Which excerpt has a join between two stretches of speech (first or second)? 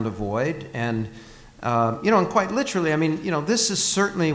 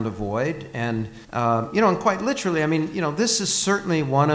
second